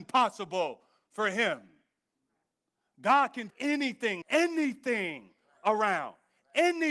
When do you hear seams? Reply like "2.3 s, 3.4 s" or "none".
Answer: 3.5 s, 4.2 s